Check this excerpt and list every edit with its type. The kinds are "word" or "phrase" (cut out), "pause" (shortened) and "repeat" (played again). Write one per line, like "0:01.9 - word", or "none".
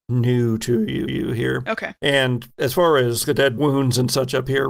0:01.1 - repeat
0:03.2 - word
0:03.6 - phrase